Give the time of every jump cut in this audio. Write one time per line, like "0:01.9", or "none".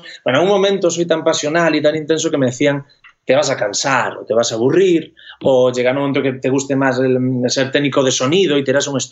none